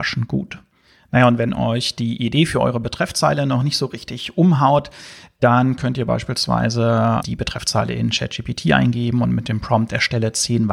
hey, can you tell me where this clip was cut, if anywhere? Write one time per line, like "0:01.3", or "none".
0:07.2